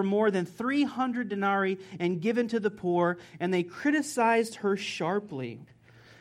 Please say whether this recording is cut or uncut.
uncut